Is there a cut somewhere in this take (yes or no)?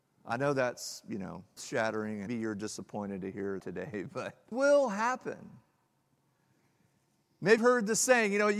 yes